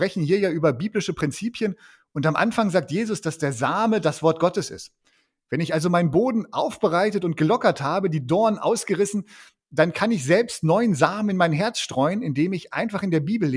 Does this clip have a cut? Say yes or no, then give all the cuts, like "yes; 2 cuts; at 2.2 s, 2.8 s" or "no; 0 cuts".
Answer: no; 0 cuts